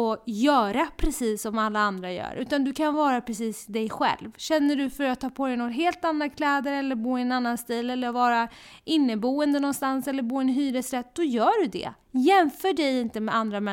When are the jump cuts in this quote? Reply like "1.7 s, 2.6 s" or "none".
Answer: 12.0 s